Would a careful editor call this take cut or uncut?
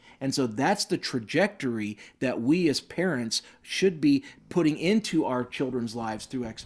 uncut